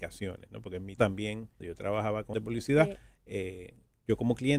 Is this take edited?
yes; 3 cuts; at 1.0 s, 1.6 s, 2.3 s

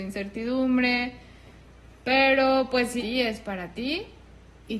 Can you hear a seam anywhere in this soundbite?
yes; 1 cut; at 3.0 s

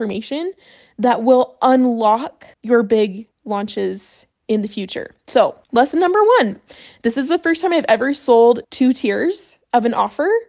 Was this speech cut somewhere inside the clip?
yes; 4 cuts; at 2.5 s, 3.3 s, 5.6 s, 8.6 s

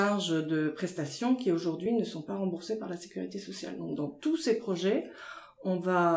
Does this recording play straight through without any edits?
yes; 0 cuts

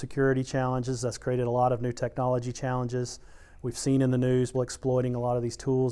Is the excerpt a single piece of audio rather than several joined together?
no; 1 cut; at 4.5 s

